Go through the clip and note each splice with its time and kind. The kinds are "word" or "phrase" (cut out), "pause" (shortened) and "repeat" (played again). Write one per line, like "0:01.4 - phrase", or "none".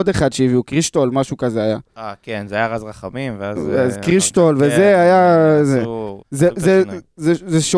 0:01.9 - pause
0:06.2 - pause